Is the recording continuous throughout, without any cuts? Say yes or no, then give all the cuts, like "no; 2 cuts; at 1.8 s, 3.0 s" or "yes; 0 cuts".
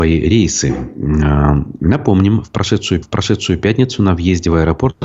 no; 1 cut; at 3.0 s